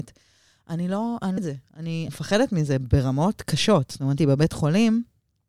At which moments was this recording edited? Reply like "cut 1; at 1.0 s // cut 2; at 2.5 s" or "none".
cut 1; at 1.4 s // cut 2; at 2.1 s // cut 3; at 4.2 s